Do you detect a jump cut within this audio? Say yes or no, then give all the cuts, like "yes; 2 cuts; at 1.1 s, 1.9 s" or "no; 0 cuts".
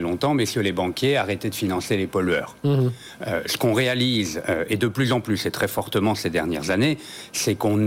no; 0 cuts